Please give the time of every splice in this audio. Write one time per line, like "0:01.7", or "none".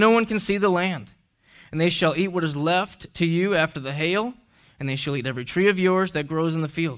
none